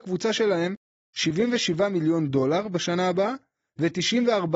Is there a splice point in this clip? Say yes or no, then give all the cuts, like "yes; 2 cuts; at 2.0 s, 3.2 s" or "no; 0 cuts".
no; 0 cuts